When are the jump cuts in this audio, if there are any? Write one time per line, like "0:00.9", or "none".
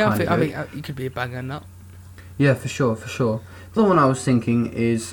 0:03.8